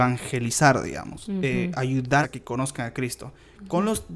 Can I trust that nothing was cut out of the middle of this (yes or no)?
no